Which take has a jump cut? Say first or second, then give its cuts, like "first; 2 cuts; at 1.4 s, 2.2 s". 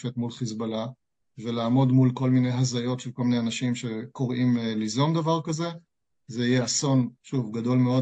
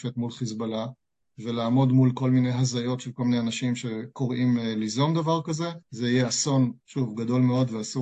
second; 1 cut; at 5.8 s